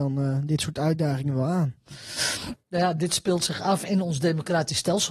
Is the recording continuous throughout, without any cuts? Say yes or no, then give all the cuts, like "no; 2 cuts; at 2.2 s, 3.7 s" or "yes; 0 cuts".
yes; 0 cuts